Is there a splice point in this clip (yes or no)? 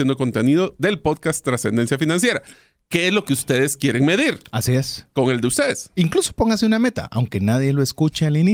no